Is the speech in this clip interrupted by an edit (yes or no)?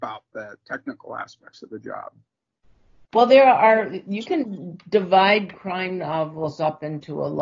no